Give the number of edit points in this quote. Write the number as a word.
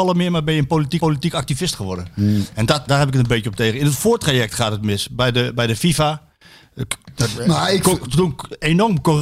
two